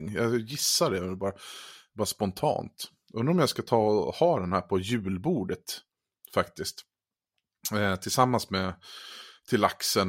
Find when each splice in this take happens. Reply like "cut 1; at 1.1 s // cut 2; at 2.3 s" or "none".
none